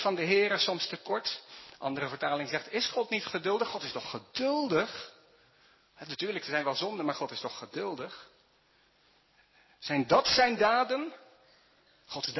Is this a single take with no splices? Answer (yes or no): yes